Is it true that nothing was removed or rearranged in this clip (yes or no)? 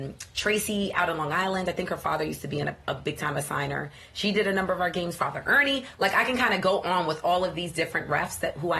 yes